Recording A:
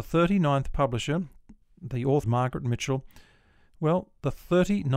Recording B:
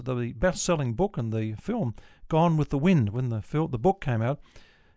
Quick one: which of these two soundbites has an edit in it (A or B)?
A